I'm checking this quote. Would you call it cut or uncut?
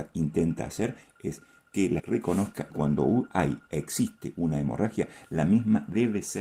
cut